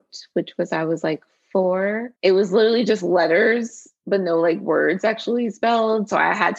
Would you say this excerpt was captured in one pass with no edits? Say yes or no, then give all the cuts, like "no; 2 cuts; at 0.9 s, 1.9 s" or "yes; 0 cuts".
no; 1 cut; at 2.2 s